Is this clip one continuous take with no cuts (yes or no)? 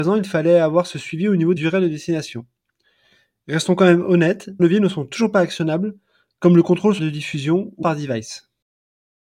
no